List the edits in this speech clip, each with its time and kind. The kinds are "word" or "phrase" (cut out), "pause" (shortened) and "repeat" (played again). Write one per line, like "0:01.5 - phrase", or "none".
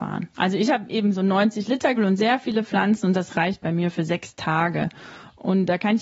0:02.0 - word